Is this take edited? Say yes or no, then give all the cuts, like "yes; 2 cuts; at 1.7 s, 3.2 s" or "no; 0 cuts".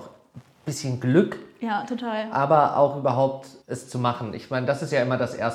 yes; 1 cut; at 3.6 s